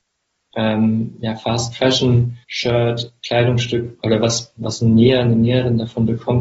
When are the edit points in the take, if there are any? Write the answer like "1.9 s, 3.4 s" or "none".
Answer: 2.4 s, 4.0 s